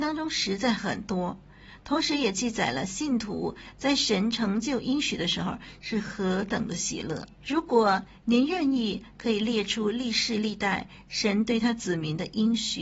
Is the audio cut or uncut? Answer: cut